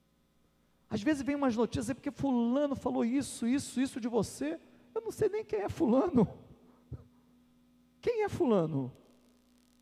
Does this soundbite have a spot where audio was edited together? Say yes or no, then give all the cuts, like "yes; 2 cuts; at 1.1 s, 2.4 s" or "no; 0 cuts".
no; 0 cuts